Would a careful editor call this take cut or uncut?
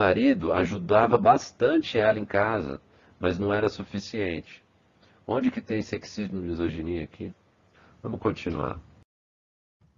uncut